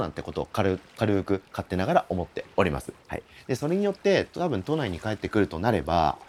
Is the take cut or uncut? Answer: cut